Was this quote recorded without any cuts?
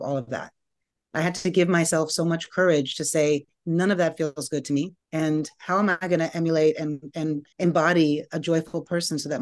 no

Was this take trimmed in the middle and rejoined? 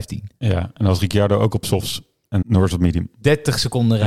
yes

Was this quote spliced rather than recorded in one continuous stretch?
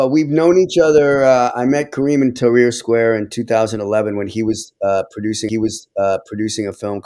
yes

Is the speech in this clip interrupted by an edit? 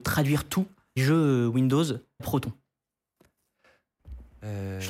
yes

